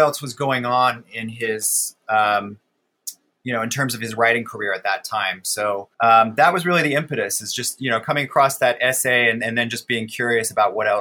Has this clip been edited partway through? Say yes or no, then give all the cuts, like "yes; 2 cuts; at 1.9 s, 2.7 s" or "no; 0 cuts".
yes; 1 cut; at 5.9 s